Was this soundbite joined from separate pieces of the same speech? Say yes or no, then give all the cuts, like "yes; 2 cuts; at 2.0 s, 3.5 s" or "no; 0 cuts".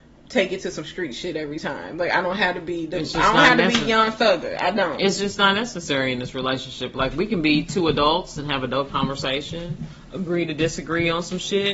no; 0 cuts